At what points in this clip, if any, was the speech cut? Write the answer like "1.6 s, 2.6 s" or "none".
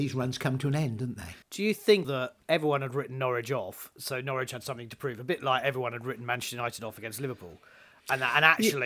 1.4 s, 2.0 s, 2.4 s